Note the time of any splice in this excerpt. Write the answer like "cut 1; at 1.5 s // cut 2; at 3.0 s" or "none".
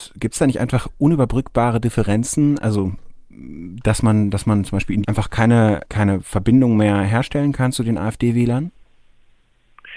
cut 1; at 5.0 s // cut 2; at 5.8 s